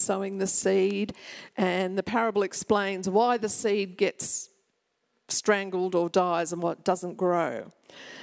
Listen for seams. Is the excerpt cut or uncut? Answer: uncut